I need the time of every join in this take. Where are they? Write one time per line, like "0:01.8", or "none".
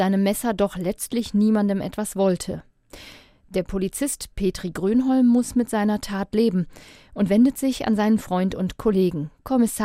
none